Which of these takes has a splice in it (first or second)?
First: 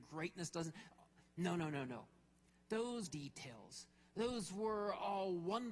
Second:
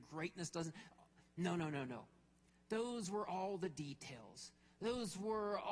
first